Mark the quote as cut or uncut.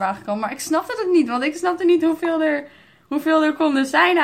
uncut